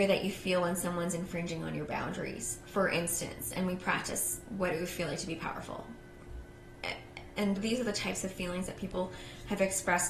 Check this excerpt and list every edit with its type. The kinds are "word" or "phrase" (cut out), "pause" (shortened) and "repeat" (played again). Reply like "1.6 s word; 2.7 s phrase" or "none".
7.6 s word